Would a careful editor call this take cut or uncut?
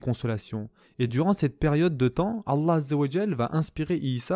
uncut